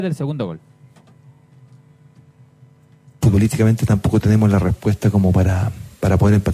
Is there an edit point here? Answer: no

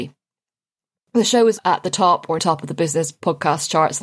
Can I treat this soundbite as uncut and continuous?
no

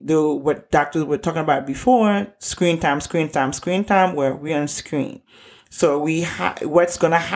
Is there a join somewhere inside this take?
no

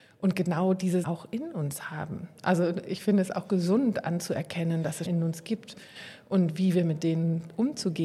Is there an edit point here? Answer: yes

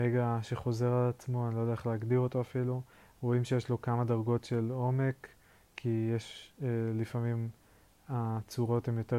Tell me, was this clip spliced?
no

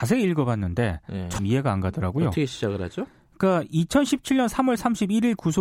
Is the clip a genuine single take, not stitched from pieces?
no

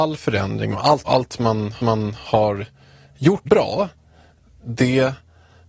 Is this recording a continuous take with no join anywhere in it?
no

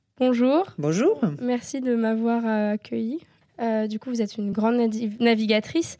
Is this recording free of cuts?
yes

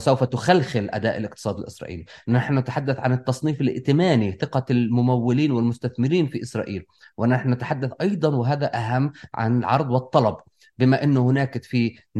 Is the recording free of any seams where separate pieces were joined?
yes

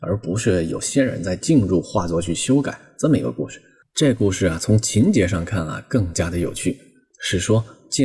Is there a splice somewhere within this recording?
no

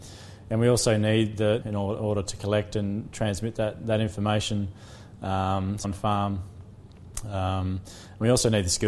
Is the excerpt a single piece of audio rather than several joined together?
no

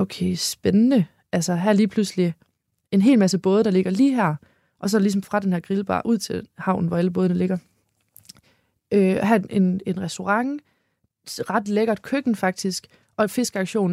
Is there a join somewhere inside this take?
yes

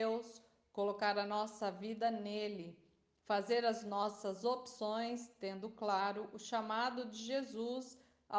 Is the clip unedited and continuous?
yes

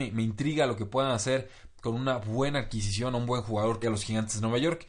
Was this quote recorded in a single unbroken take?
no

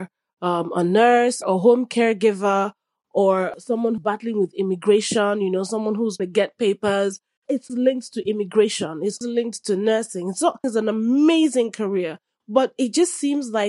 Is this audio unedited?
no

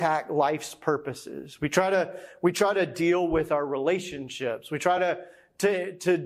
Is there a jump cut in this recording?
no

